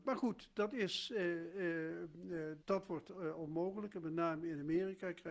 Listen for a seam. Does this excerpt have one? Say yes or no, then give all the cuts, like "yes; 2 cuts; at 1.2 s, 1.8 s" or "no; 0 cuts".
yes; 1 cut; at 2.6 s